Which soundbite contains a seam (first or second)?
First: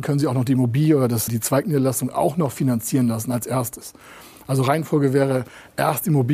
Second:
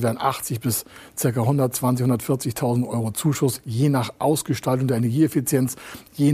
first